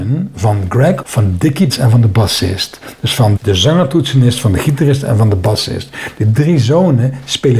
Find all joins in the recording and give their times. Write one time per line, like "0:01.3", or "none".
0:01.0
0:01.7
0:03.4